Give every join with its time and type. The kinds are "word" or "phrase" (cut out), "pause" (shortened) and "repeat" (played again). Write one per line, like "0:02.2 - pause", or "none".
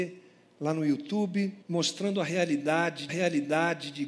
0:01.6 - pause
0:03.1 - repeat